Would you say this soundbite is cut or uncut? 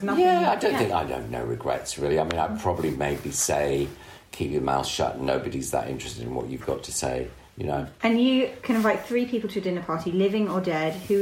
uncut